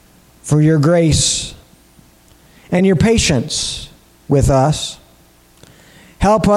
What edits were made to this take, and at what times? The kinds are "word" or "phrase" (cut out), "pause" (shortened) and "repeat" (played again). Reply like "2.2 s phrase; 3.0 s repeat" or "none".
none